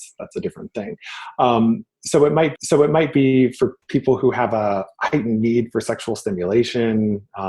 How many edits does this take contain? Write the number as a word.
two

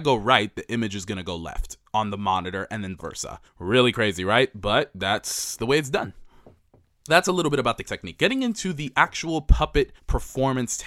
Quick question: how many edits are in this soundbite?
five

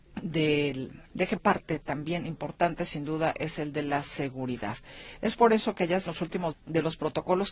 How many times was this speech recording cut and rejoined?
four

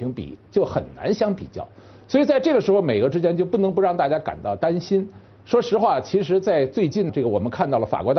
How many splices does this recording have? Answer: one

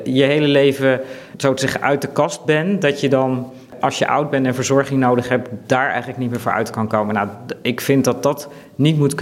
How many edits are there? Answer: zero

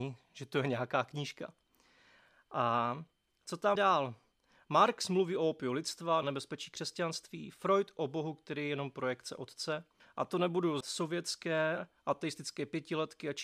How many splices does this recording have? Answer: four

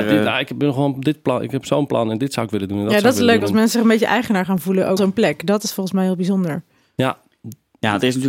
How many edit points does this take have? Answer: one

